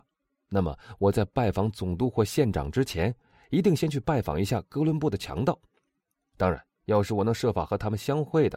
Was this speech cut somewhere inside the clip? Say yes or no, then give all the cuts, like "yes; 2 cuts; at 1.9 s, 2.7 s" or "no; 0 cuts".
yes; 1 cut; at 6.7 s